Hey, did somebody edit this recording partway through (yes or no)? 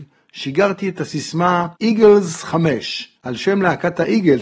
yes